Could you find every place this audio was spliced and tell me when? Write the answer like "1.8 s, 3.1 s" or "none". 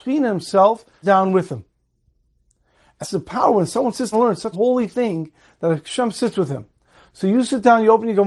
1.0 s, 3.0 s, 4.1 s, 4.5 s